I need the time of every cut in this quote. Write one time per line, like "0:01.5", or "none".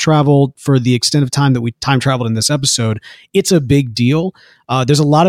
none